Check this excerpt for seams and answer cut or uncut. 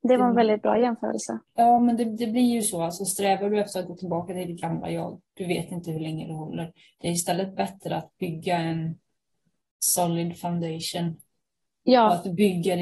uncut